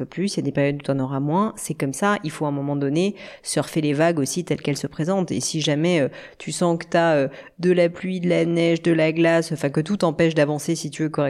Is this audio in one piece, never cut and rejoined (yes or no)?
yes